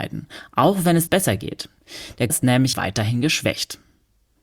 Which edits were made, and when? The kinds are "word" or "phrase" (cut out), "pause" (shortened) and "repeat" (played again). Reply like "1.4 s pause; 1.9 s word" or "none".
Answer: 1.1 s phrase; 2.3 s word; 2.7 s phrase